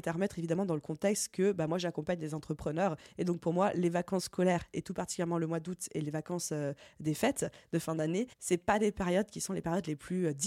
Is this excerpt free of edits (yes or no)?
no